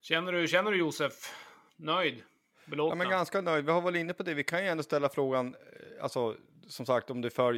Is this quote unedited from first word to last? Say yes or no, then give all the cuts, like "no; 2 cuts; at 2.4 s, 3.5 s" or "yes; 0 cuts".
yes; 0 cuts